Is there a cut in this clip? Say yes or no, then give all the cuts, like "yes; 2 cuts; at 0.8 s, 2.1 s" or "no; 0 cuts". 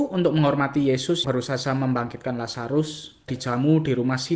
yes; 2 cuts; at 1.2 s, 3.3 s